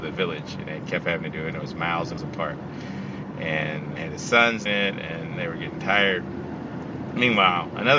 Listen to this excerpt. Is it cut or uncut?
cut